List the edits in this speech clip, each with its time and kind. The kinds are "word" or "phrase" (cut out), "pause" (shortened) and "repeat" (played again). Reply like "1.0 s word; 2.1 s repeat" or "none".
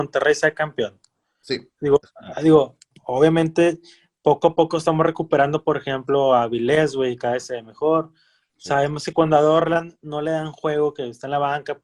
none